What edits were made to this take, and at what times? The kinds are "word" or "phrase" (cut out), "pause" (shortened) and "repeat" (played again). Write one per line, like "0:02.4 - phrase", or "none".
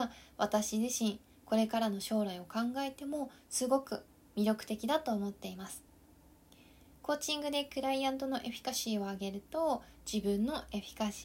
none